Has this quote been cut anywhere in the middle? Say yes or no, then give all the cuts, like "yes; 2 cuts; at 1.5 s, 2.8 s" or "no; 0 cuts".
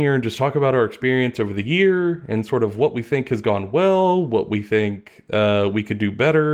no; 0 cuts